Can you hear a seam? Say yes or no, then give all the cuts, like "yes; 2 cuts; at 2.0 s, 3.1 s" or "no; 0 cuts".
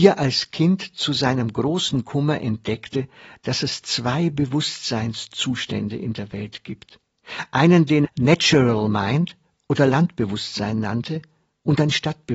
yes; 1 cut; at 8.0 s